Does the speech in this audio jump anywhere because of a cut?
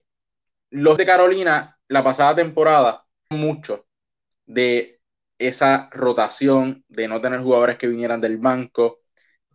yes; 2 cuts; at 1.0 s, 3.3 s

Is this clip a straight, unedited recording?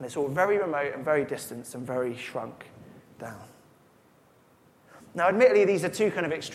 yes; 0 cuts

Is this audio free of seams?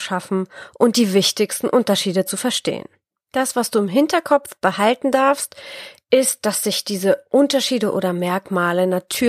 yes; 0 cuts

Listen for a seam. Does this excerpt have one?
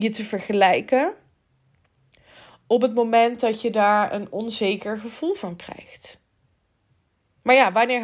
no; 0 cuts

